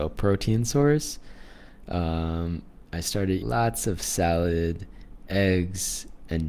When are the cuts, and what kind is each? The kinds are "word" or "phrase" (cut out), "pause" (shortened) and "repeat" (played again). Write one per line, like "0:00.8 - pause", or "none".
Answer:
0:03.4 - word
0:05.3 - word